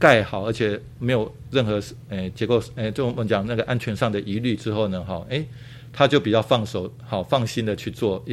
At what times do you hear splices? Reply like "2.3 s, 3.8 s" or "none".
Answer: none